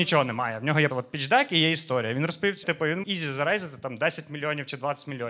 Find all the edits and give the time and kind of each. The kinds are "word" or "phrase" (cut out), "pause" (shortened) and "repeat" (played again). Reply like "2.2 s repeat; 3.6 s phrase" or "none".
0.9 s word; 2.6 s word; 3.0 s word